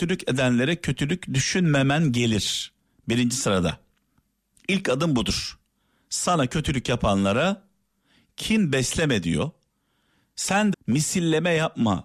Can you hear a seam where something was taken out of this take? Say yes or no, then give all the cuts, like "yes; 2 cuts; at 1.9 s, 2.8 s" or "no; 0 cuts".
yes; 1 cut; at 10.7 s